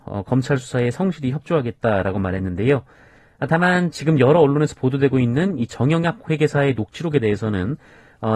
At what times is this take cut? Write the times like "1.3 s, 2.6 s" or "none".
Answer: none